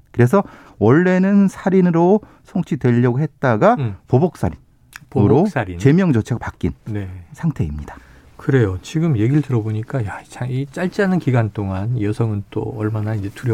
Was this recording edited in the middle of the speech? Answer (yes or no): no